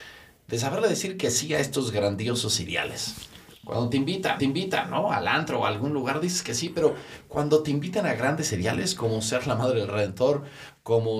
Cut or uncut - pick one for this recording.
cut